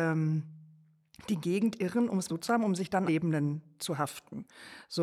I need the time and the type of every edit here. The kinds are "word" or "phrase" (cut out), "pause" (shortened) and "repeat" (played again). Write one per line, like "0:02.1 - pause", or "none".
0:02.3 - word
0:03.1 - word